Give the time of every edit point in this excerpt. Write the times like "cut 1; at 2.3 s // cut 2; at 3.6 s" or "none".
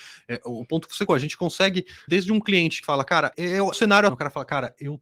cut 1; at 1.1 s // cut 2; at 2.1 s // cut 3; at 2.8 s // cut 4; at 3.3 s // cut 5; at 3.7 s // cut 6; at 4.1 s

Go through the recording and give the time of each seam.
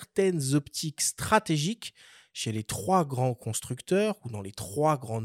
none

